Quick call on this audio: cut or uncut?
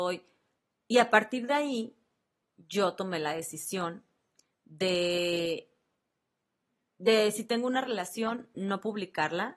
uncut